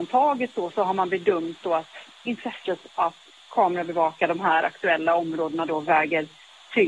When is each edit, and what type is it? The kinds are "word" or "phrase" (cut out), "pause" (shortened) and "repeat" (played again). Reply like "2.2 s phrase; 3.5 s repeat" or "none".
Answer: none